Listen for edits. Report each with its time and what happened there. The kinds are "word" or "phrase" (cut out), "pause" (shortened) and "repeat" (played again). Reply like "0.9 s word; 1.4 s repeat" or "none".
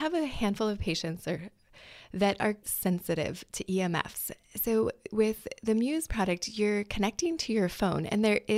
2.6 s word

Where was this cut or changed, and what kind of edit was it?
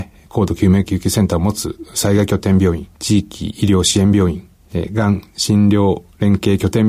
2.9 s pause

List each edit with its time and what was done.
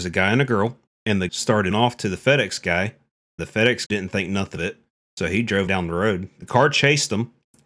1.3 s word; 1.7 s word; 3.4 s word; 3.9 s word; 4.6 s word; 5.7 s word

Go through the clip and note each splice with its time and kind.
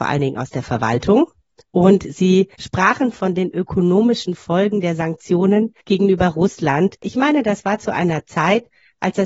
2.5 s pause; 5.8 s pause

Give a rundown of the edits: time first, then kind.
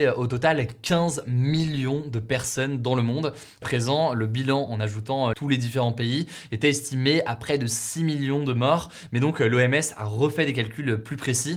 3.6 s phrase; 5.3 s phrase

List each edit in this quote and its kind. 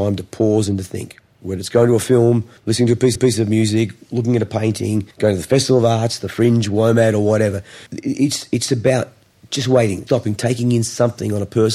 2.6 s pause; 3.2 s repeat; 5.1 s pause; 7.9 s pause; 9.3 s pause; 10.1 s word

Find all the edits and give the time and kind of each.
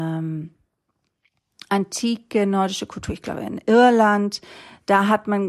none

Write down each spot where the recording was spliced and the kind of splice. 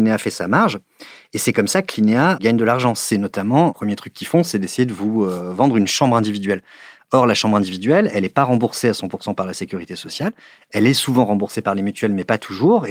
none

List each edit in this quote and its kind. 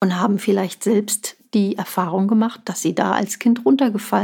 none

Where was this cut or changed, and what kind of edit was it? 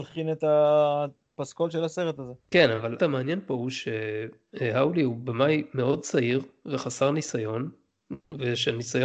2.4 s pause; 3.0 s word

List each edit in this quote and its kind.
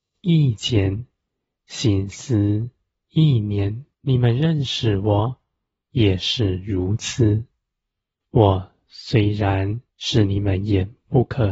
3.9 s pause; 9.9 s pause

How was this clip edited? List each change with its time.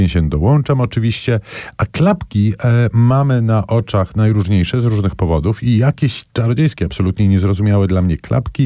none

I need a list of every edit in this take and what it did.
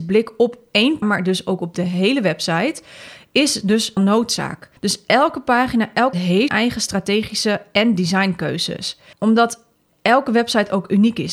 1.0 s word; 4.0 s word; 4.8 s pause; 6.1 s word; 6.5 s word; 9.1 s pause

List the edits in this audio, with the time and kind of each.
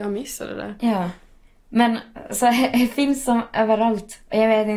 none

